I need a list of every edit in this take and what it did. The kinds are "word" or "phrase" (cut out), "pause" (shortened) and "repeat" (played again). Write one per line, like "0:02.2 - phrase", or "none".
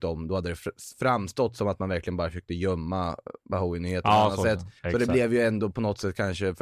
0:04.8 - pause